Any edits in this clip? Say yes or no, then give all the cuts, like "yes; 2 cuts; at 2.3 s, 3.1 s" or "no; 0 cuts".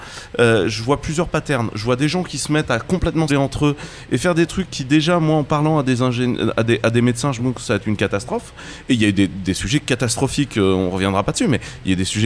yes; 2 cuts; at 3.3 s, 7.4 s